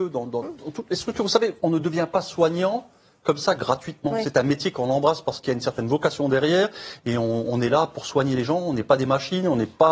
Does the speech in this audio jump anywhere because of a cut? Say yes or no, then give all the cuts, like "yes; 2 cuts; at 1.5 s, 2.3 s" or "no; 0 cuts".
no; 0 cuts